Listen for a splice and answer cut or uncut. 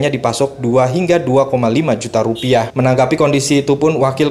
uncut